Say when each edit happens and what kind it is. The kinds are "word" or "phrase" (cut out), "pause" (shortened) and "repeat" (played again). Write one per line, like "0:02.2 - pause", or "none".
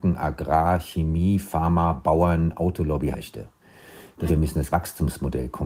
0:03.1 - word
0:04.3 - word
0:04.7 - word